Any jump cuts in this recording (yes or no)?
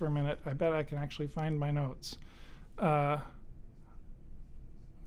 no